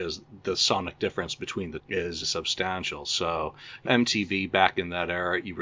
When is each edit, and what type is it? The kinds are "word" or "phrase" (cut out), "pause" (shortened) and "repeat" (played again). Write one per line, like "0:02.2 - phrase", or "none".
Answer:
0:01.8 - word
0:02.2 - phrase
0:03.9 - word